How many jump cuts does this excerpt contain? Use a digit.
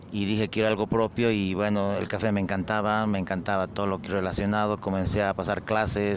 0